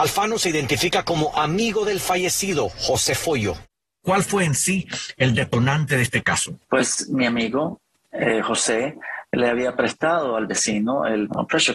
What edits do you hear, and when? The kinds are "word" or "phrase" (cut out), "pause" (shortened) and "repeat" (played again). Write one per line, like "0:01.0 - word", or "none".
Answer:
none